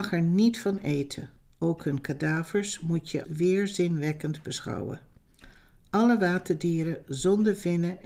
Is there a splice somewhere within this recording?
yes; 1 cut; at 3.2 s

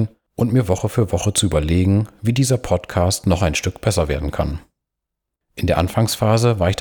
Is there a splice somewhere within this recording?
no; 0 cuts

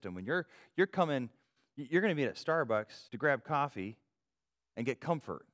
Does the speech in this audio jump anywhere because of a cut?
yes; 1 cut; at 3.1 s

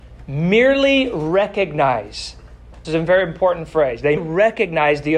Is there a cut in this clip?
yes; 2 cuts; at 2.8 s, 4.2 s

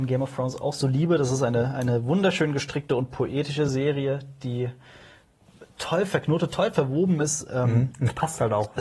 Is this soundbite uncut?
yes; 0 cuts

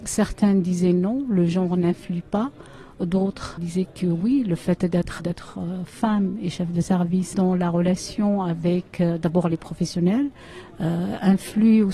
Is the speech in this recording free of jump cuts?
no; 3 cuts; at 3.6 s, 5.2 s, 7.3 s

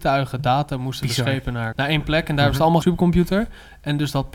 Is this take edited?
yes; 2 cuts; at 1.7 s, 2.8 s

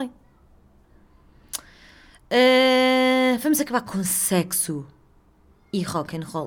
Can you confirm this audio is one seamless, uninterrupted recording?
yes; 0 cuts

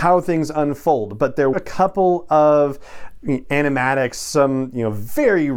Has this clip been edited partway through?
yes; 1 cut; at 1.5 s

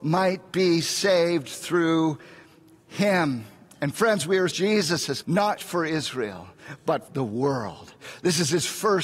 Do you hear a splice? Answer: yes; 4 cuts; at 4.5 s, 5.2 s, 5.6 s, 7.1 s

